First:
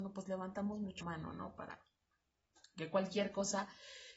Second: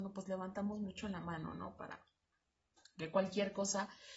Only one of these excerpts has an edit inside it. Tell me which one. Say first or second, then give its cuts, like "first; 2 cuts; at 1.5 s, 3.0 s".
first; 1 cut; at 1.0 s